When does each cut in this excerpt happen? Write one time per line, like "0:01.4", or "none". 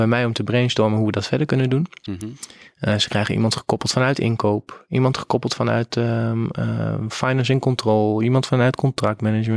none